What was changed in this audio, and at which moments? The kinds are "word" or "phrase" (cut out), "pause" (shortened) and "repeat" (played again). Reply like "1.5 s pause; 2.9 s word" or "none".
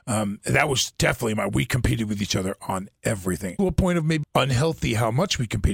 3.6 s phrase; 4.2 s phrase